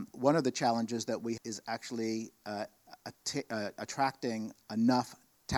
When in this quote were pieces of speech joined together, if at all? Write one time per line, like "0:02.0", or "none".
0:01.4